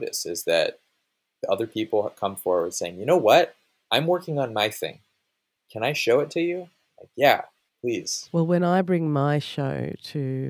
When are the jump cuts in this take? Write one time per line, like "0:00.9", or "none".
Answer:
none